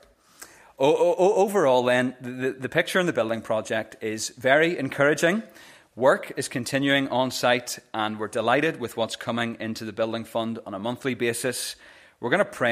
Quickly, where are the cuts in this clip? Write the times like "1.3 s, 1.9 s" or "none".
none

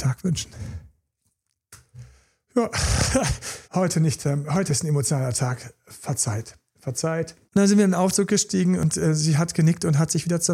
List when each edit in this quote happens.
3.6 s, 4.7 s, 7.5 s

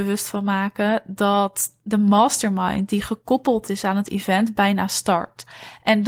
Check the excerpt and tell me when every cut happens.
none

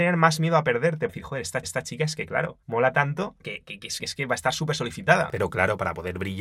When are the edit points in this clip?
1.1 s, 1.6 s, 2.6 s, 3.4 s, 4.0 s

